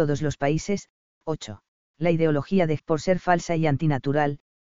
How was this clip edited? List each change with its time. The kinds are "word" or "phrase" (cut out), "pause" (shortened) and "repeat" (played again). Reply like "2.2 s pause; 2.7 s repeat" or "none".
1.7 s pause; 2.8 s word